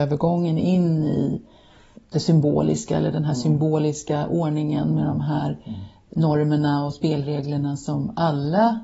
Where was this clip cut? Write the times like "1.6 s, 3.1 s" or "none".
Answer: none